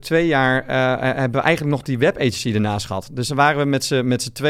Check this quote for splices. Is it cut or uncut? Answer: uncut